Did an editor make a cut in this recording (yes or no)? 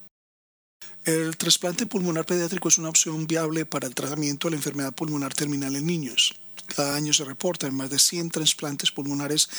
no